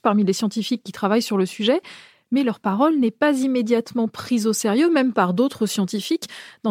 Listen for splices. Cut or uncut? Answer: uncut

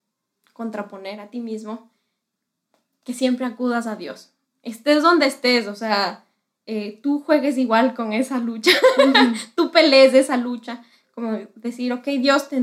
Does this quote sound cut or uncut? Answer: uncut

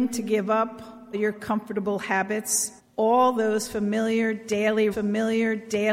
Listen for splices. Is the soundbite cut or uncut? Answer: cut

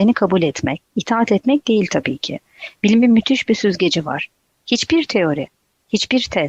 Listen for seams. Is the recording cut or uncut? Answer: uncut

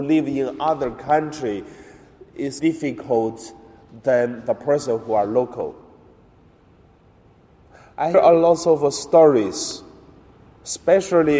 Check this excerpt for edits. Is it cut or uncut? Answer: cut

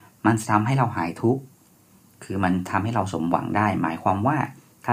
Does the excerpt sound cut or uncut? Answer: uncut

